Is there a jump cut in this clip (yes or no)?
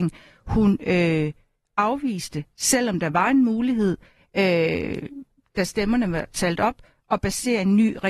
no